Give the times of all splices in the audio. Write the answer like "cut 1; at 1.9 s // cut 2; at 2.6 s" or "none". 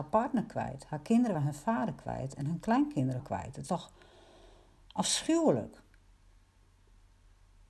cut 1; at 1.3 s // cut 2; at 3.2 s // cut 3; at 3.7 s

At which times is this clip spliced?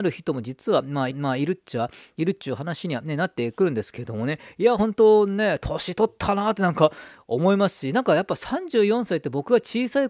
cut 1; at 1.1 s

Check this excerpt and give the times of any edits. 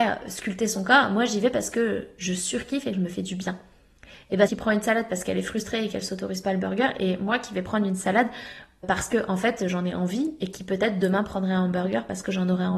cut 1; at 4.5 s // cut 2; at 8.8 s

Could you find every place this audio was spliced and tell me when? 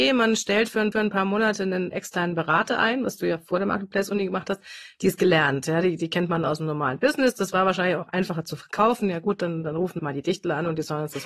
cut 1; at 0.9 s // cut 2; at 10.0 s

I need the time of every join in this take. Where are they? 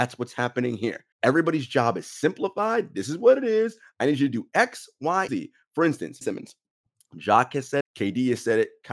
cut 1; at 1.1 s // cut 2; at 5.3 s // cut 3; at 6.2 s // cut 4; at 6.9 s // cut 5; at 7.8 s

